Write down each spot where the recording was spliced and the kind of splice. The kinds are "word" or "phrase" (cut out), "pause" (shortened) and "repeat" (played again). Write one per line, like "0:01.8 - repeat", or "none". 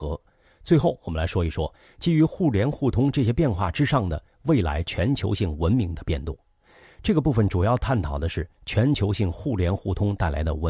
none